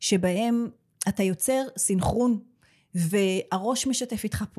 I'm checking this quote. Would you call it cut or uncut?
uncut